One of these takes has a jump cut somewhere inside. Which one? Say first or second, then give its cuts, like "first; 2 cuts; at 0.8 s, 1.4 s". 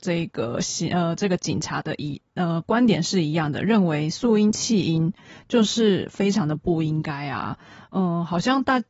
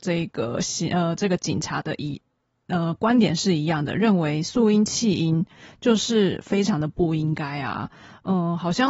first; 1 cut; at 2.3 s